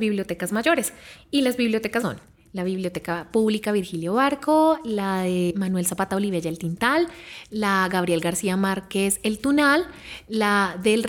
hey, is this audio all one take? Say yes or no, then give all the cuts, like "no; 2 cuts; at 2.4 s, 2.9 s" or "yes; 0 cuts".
no; 1 cut; at 2.0 s